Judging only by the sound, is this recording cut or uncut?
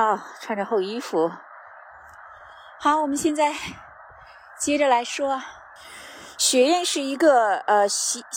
uncut